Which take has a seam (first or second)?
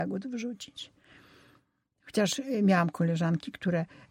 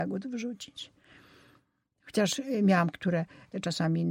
second